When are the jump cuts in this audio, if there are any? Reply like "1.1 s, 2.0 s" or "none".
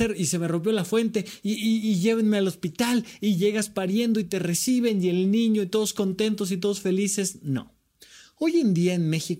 none

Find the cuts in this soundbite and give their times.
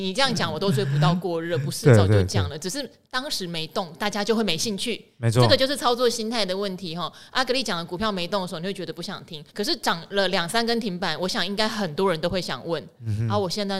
9.5 s

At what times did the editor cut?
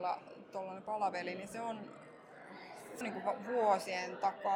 3.0 s

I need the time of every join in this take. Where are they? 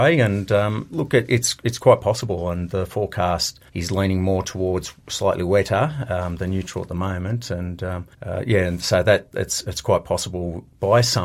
3.7 s, 8.1 s

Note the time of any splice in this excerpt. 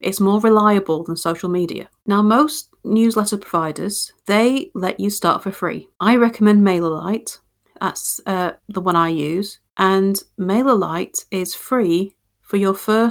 2.0 s, 4.2 s, 5.9 s, 7.6 s, 8.6 s, 9.7 s

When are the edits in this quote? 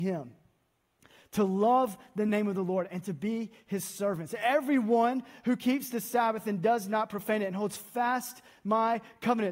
none

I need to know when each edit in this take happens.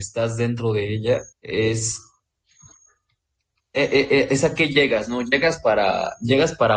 1.3 s

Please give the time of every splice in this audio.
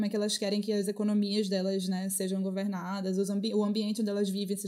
none

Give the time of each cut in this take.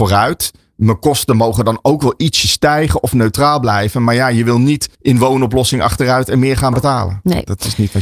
4.9 s

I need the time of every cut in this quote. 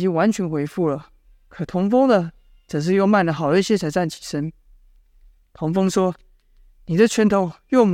none

